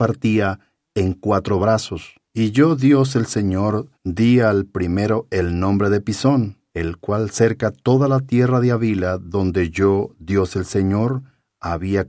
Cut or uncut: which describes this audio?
cut